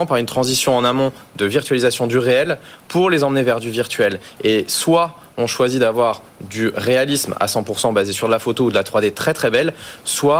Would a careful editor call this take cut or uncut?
uncut